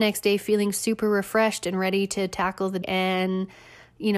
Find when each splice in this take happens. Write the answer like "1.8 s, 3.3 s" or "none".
2.8 s